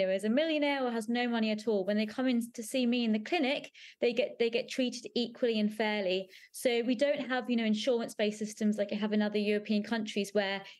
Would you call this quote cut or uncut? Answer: uncut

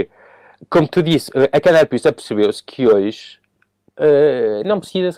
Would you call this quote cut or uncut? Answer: uncut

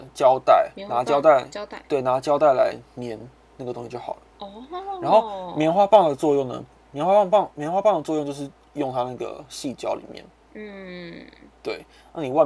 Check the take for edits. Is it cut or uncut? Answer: cut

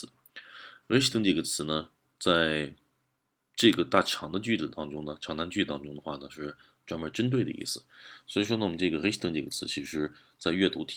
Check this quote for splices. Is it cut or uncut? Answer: uncut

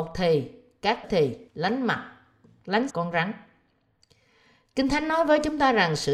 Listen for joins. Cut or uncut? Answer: cut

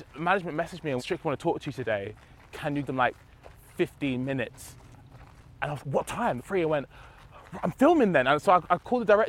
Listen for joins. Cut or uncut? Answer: cut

